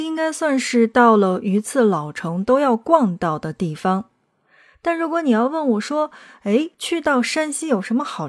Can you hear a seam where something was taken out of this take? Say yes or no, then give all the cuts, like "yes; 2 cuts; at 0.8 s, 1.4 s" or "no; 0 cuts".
yes; 1 cut; at 6.7 s